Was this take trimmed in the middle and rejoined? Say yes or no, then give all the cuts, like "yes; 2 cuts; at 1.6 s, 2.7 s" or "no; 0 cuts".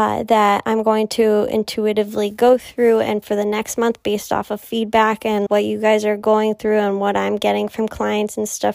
yes; 2 cuts; at 3.2 s, 5.5 s